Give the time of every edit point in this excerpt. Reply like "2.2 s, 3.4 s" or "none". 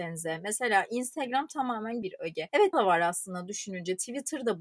2.0 s, 2.7 s